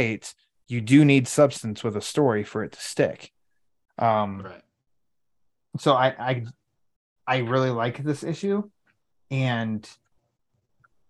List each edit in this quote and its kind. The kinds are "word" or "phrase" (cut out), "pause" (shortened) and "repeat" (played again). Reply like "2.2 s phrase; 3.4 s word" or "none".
none